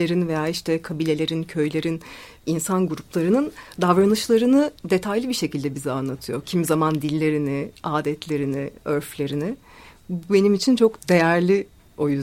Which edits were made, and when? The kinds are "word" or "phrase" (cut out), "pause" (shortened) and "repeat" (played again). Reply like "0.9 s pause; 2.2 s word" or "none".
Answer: none